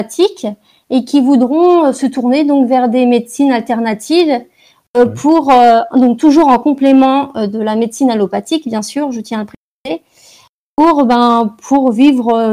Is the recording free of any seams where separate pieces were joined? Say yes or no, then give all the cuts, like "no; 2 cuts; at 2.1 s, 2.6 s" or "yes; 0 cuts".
yes; 0 cuts